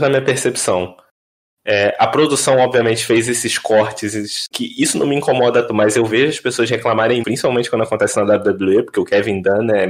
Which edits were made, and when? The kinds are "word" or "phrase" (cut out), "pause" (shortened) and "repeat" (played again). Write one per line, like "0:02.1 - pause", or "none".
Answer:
0:04.5 - word
0:05.7 - word
0:07.2 - word